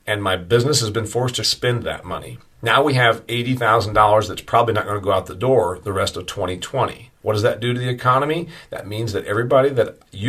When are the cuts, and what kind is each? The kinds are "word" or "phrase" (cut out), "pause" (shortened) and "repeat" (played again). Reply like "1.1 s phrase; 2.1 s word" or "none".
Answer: 1.4 s phrase